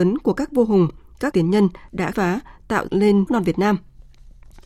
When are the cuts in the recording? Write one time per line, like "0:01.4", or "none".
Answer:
0:01.3
0:02.1
0:02.9
0:03.3

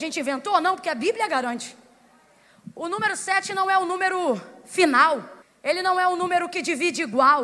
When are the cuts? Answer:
0:05.4

